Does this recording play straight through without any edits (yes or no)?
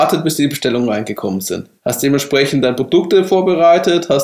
no